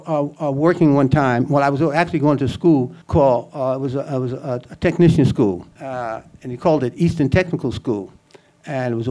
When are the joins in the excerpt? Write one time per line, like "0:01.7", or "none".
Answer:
0:03.0
0:05.7